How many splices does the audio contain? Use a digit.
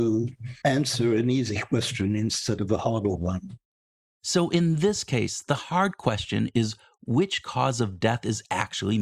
0